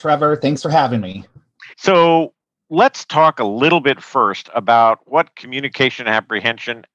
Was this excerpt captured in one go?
no; 1 cut; at 1.7 s

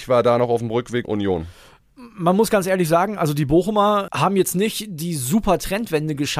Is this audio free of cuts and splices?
no; 1 cut; at 1.0 s

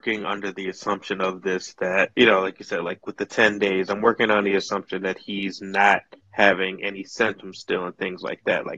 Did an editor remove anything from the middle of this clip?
yes; 2 cuts; at 2.1 s, 6.2 s

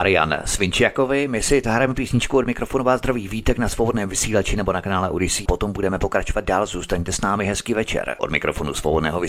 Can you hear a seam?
yes; 2 cuts; at 1.6 s, 5.5 s

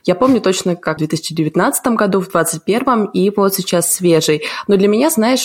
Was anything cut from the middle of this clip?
yes; 1 cut; at 1.0 s

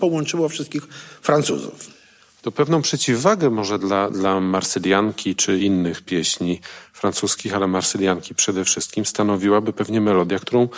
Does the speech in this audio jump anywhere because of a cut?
no; 0 cuts

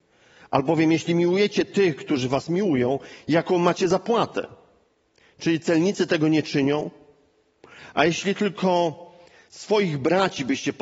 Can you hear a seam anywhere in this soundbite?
no; 0 cuts

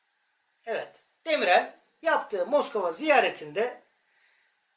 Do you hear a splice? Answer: no; 0 cuts

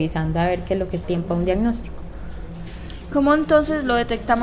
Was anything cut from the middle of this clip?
yes; 1 cut; at 1.0 s

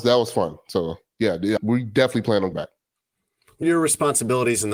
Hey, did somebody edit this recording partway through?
yes; 3 cuts; at 1.6 s, 2.5 s, 3.6 s

